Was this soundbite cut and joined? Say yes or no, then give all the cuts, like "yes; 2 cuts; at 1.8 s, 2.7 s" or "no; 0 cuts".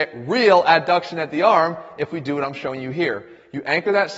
no; 0 cuts